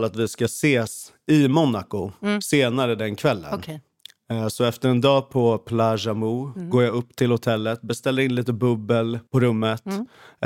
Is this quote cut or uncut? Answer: cut